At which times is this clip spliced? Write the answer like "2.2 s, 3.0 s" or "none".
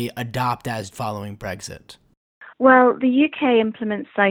0.9 s, 2.5 s